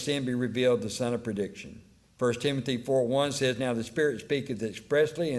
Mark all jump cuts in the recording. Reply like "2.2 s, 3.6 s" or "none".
2.0 s